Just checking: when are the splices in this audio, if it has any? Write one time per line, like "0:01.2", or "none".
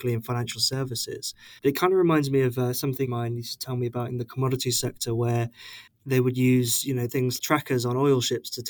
0:01.6
0:03.0
0:07.4